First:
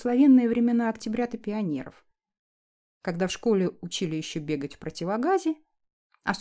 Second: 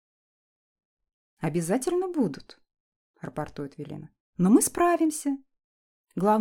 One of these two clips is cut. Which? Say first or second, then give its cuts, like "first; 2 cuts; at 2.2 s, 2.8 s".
second; 1 cut; at 4.2 s